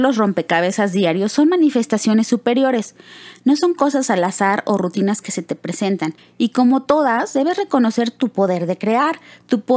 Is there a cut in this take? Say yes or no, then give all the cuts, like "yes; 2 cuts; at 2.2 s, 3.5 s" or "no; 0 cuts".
yes; 1 cut; at 6.2 s